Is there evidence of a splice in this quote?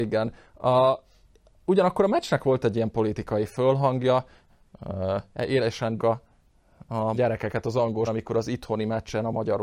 yes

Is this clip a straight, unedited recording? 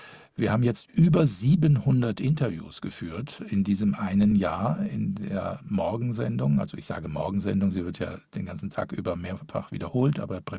yes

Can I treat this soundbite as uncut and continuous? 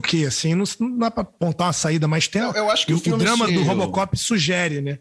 no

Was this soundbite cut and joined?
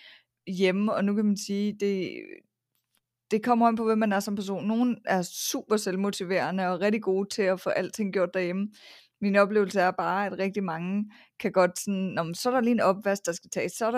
no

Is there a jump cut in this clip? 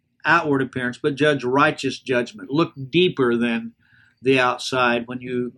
no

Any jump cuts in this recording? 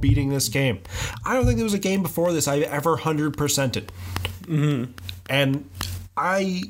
no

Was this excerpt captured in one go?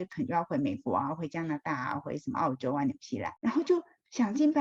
no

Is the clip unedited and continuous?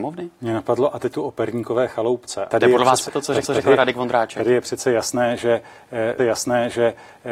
no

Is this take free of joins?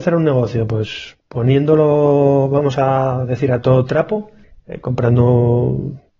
no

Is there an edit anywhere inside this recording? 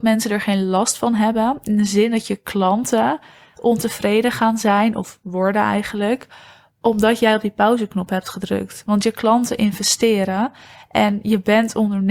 no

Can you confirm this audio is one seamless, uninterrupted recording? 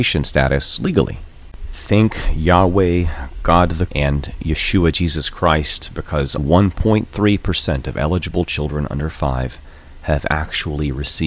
no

